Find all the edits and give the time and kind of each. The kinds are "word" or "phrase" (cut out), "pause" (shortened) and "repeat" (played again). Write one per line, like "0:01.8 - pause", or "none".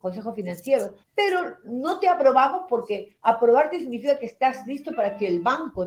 0:01.0 - pause

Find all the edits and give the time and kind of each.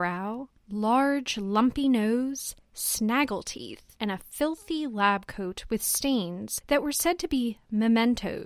0:04.0 - pause

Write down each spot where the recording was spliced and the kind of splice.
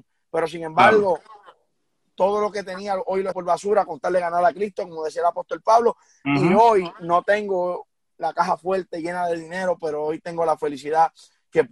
0:03.3 - word

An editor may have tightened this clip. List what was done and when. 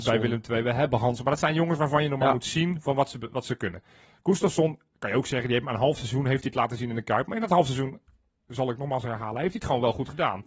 none

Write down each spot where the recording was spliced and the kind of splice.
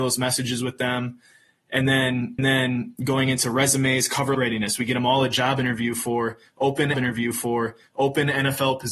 0:02.4 - repeat
0:04.3 - phrase
0:06.9 - repeat

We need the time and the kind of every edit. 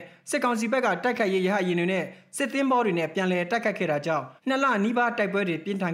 0:04.4 - pause

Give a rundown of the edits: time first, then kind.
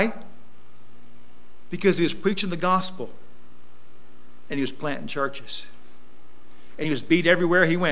none

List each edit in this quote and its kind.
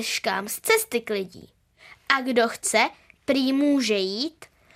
none

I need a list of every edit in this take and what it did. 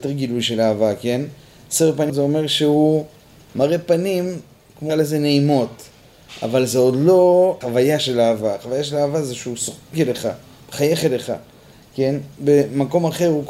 0:02.1 - word
0:04.9 - word
0:07.6 - word
0:09.9 - word

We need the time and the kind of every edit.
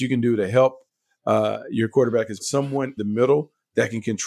0:02.4 - word
0:03.0 - word

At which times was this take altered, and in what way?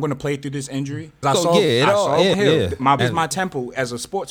0:01.2 - word
0:02.3 - word
0:03.0 - word

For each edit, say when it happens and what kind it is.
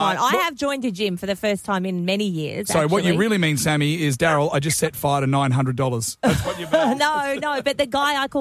none

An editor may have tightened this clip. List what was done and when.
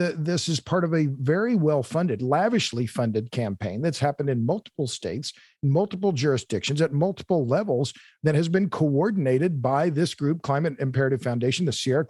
none

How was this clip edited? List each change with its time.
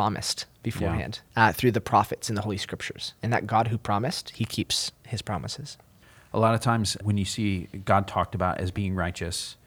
0:01.2 - pause
0:06.0 - pause
0:07.0 - word

